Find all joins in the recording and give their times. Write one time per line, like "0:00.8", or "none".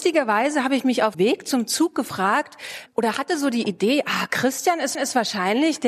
0:01.1
0:02.9
0:04.9